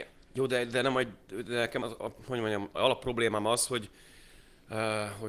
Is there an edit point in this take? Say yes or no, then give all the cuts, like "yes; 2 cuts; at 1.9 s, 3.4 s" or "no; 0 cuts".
yes; 1 cut; at 1.8 s